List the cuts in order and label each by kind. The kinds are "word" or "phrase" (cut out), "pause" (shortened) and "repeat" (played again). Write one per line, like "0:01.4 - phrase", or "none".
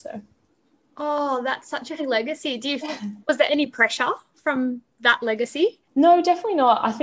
0:02.0 - word
0:02.8 - word
0:03.5 - word
0:04.9 - pause
0:05.8 - pause